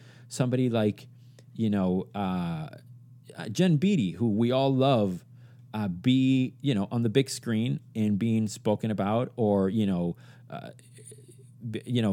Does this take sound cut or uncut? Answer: uncut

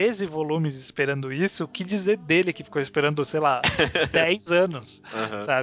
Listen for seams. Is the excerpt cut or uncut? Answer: uncut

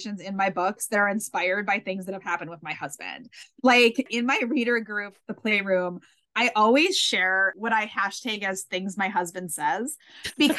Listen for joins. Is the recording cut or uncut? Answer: uncut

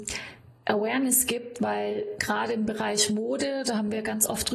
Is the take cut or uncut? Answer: uncut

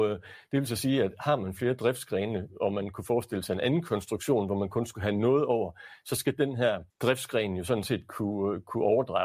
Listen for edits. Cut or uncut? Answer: cut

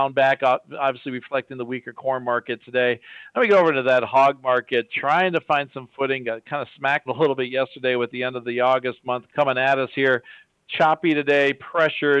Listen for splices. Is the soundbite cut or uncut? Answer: cut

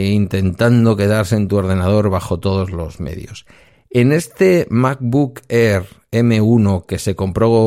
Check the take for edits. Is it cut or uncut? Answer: uncut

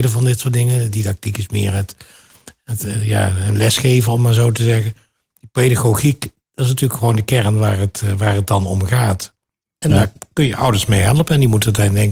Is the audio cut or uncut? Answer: uncut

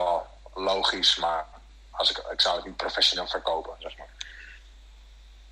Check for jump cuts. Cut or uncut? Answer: uncut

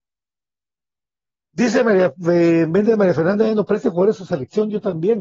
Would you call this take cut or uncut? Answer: uncut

